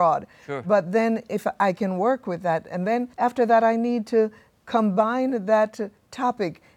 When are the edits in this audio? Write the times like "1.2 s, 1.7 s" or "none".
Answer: 3.1 s